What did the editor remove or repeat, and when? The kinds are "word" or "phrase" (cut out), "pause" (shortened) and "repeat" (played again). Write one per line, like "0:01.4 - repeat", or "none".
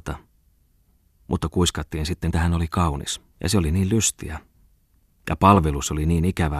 0:02.3 - phrase
0:03.3 - pause